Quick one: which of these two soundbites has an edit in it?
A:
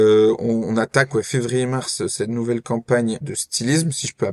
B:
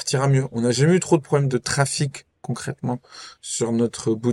A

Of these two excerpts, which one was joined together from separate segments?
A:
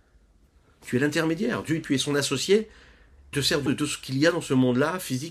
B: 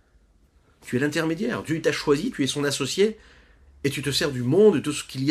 A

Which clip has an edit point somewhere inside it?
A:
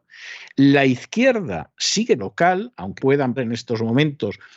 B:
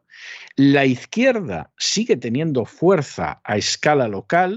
A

